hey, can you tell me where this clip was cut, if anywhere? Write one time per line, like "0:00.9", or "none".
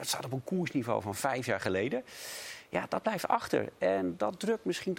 none